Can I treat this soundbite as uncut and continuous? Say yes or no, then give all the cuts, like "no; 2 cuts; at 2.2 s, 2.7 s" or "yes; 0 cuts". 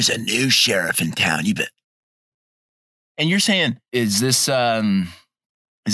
no; 2 cuts; at 1.6 s, 3.9 s